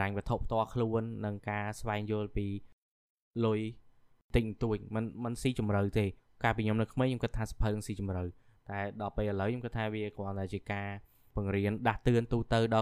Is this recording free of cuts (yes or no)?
yes